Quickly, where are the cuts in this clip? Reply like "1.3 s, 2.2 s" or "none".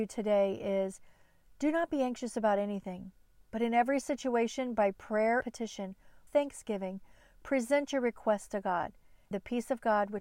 5.4 s, 6.3 s, 9.3 s